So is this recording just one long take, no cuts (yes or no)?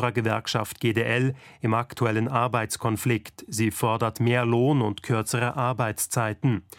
yes